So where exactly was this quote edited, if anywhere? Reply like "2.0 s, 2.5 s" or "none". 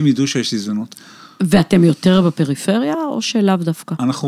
none